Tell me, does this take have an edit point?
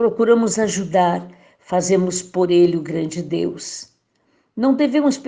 no; 0 cuts

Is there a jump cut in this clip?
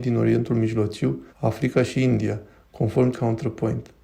yes; 2 cuts; at 1.3 s, 3.1 s

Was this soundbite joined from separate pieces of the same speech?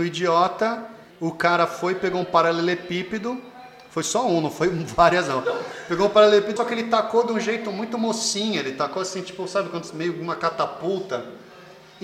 yes; 2 cuts; at 1.1 s, 6.6 s

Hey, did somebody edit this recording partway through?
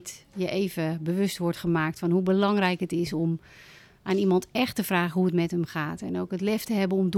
no; 0 cuts

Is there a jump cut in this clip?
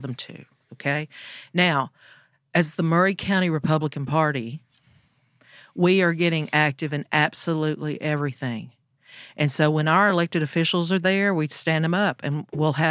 no; 0 cuts

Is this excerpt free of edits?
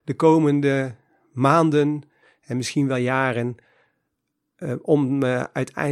yes; 0 cuts

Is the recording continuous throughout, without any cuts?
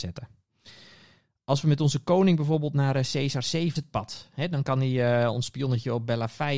no; 1 cut; at 3.8 s

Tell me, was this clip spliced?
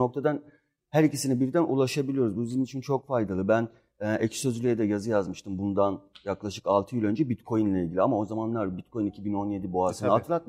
no; 0 cuts

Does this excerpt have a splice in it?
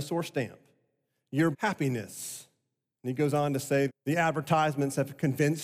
yes; 2 cuts; at 1.5 s, 3.9 s

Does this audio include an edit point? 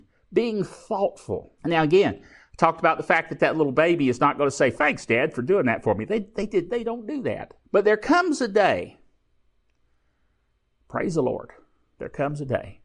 yes; 2 cuts; at 1.6 s, 7.6 s

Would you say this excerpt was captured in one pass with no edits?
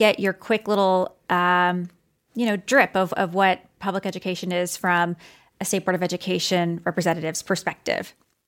yes; 0 cuts

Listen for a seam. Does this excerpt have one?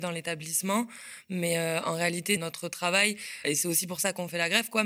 yes; 2 cuts; at 2.4 s, 3.4 s

